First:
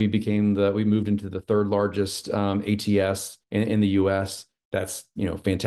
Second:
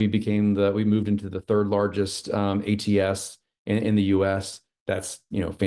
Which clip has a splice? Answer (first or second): first